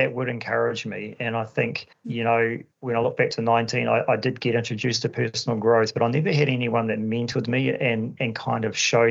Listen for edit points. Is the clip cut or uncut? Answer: cut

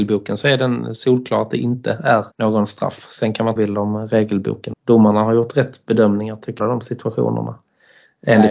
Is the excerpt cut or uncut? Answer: cut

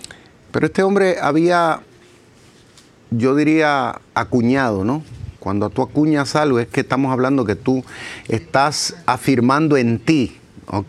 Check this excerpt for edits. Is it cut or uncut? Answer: cut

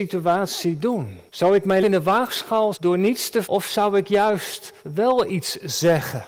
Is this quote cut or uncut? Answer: cut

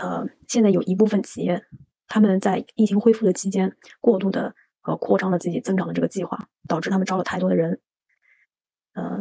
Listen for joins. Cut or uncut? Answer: uncut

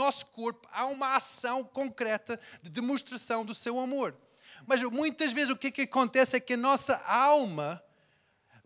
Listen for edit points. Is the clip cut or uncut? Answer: uncut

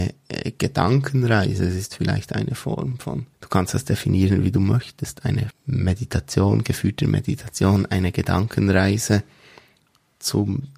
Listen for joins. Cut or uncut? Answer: cut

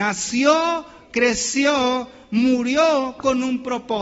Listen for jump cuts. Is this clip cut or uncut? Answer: uncut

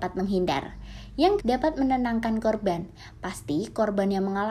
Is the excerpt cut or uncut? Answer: cut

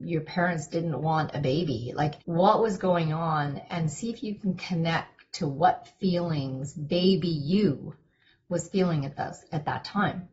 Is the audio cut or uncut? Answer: cut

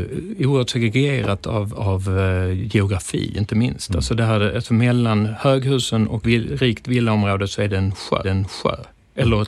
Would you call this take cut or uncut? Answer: cut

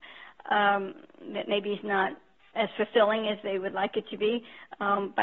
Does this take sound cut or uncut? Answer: uncut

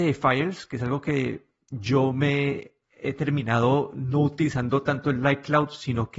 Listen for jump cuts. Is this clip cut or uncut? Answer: uncut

